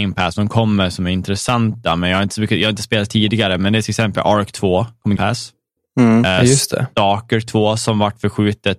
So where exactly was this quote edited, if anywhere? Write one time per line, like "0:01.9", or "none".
0:05.2
0:05.8